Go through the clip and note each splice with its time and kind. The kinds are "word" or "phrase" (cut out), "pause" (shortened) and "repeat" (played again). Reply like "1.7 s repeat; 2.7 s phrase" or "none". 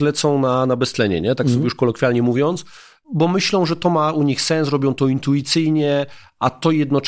none